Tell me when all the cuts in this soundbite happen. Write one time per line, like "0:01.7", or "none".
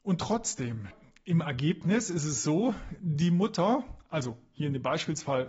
none